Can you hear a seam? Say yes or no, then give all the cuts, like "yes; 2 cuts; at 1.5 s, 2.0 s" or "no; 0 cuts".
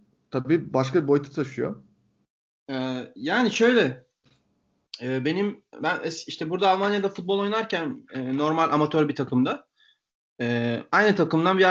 no; 0 cuts